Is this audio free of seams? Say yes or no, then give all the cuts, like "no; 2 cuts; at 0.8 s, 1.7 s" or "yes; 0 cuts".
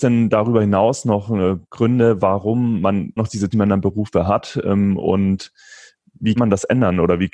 no; 4 cuts; at 1.6 s, 3.2 s, 3.5 s, 6.4 s